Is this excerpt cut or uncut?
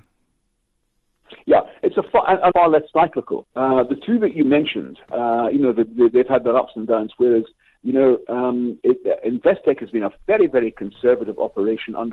cut